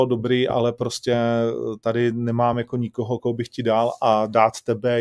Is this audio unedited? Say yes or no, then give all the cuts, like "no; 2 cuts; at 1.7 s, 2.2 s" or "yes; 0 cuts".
yes; 0 cuts